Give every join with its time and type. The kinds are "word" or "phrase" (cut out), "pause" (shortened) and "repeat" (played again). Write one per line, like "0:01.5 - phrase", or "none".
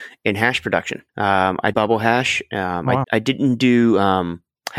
0:01.1 - pause
0:01.7 - word
0:03.0 - word